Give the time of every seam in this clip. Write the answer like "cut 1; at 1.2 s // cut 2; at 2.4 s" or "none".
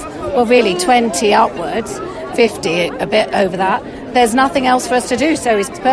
cut 1; at 2.3 s